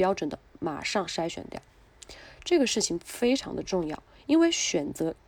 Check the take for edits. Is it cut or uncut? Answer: uncut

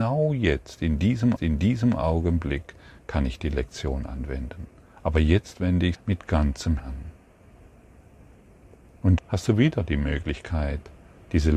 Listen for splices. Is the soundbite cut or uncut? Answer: cut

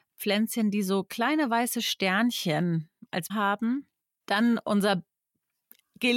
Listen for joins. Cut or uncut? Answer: cut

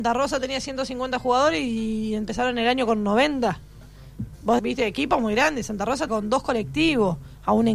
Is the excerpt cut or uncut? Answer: cut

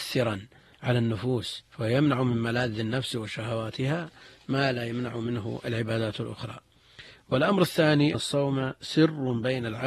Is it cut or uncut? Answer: cut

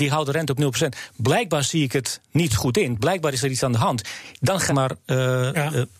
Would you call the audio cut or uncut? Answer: cut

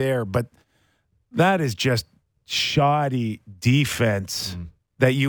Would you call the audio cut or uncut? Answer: uncut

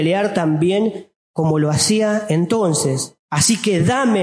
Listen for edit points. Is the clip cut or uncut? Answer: cut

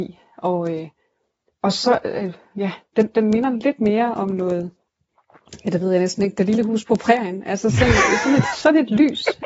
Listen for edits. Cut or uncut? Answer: uncut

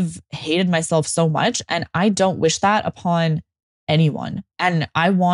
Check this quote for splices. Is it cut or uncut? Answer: uncut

